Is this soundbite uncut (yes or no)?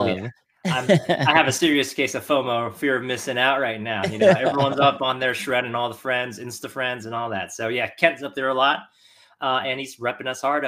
yes